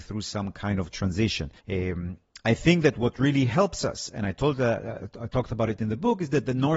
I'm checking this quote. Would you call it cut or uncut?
cut